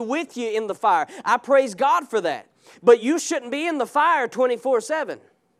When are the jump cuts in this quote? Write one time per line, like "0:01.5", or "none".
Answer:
none